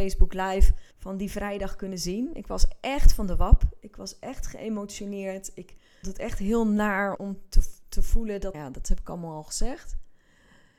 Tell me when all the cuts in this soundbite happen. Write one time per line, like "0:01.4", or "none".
0:00.9
0:06.0
0:07.2
0:08.5